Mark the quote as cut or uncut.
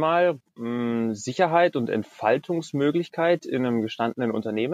uncut